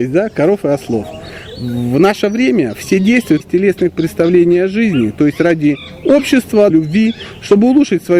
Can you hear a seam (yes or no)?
yes